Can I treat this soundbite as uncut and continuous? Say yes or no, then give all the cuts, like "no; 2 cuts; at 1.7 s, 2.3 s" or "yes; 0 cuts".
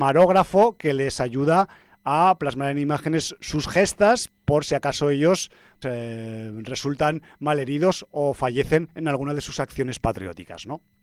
no; 1 cut; at 5.8 s